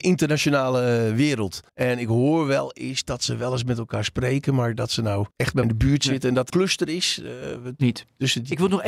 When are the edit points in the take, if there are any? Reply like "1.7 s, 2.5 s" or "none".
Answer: 1.7 s, 5.3 s, 5.6 s, 6.5 s